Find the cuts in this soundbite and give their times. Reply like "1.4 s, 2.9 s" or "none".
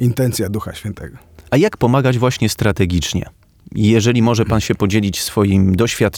none

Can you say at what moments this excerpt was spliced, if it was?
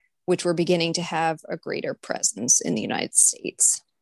none

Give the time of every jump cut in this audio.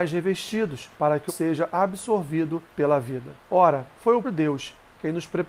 0.9 s, 1.3 s, 2.7 s, 3.4 s, 4.2 s

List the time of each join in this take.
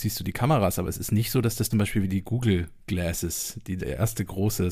1.7 s

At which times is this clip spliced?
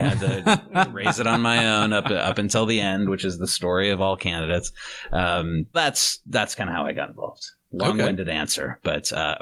5.7 s

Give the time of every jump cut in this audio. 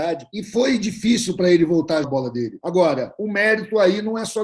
2.0 s

